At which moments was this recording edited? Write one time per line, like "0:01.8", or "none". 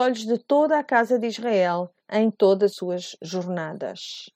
0:02.0
0:02.7